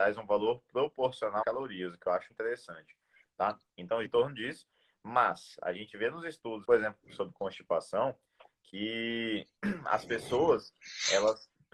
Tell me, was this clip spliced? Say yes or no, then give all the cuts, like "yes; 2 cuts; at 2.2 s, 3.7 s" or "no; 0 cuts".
yes; 4 cuts; at 1.4 s, 2.3 s, 4.0 s, 6.6 s